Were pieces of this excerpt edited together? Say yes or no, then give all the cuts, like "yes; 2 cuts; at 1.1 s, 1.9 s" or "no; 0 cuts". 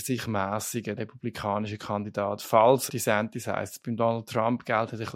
yes; 2 cuts; at 1.0 s, 2.9 s